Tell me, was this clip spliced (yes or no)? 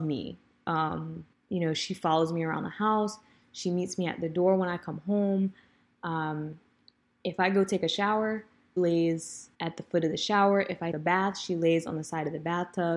yes